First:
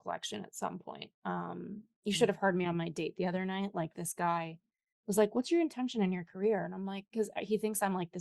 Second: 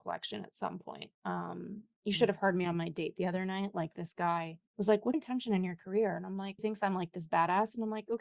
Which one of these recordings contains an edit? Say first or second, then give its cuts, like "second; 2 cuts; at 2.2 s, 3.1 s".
second; 3 cuts; at 4.7 s, 5.1 s, 6.6 s